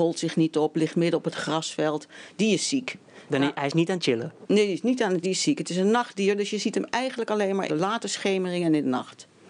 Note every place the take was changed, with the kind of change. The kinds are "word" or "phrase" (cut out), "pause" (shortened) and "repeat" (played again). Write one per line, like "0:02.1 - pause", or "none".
0:05.2 - word
0:07.7 - word